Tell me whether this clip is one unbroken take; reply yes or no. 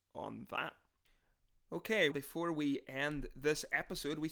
no